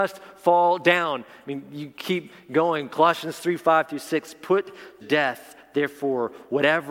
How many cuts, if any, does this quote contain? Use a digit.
1